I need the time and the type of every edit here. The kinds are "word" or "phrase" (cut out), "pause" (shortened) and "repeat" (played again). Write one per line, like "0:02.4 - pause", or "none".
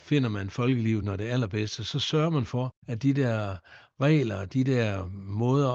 none